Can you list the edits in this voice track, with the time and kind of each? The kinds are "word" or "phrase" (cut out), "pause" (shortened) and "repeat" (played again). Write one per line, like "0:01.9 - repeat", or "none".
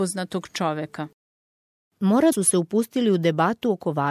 0:02.3 - word

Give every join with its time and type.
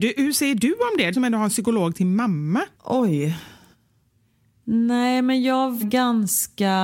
0:01.1 - word
0:02.7 - pause
0:05.8 - word

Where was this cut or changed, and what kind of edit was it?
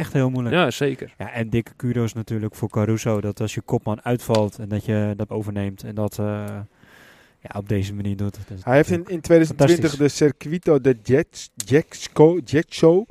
0:05.3 - word

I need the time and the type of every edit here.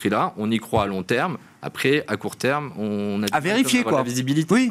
none

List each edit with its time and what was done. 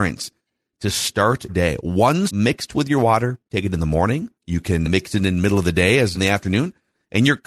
0:01.5 - word
0:02.3 - word
0:03.5 - pause
0:04.3 - pause
0:04.8 - word
0:06.1 - phrase

